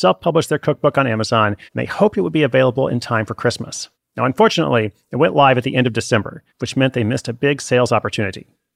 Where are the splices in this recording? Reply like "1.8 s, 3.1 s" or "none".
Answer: 1.7 s, 3.9 s, 6.5 s